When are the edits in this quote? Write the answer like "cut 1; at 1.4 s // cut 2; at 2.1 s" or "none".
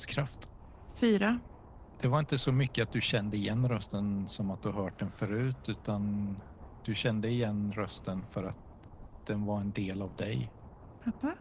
none